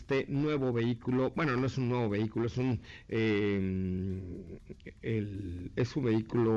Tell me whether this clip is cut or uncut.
uncut